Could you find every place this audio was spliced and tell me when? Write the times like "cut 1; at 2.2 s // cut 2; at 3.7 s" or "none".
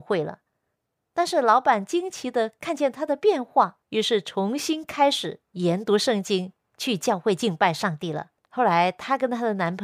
cut 1; at 3.8 s // cut 2; at 8.4 s